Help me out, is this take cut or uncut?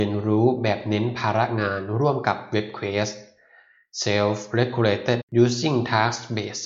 cut